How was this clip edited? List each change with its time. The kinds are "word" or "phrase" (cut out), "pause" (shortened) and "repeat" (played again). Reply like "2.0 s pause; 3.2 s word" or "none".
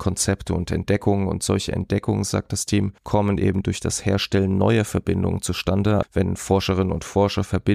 3.0 s pause; 6.0 s word